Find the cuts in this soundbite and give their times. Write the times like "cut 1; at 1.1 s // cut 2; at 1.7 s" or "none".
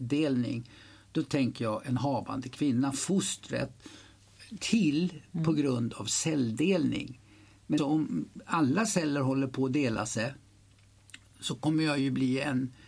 cut 1; at 4.6 s // cut 2; at 7.8 s